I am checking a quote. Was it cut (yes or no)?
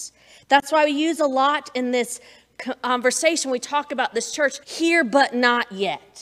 yes